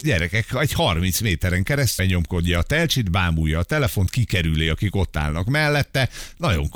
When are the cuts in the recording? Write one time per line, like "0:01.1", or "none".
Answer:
0:02.0